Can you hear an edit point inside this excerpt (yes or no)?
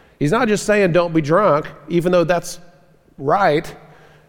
no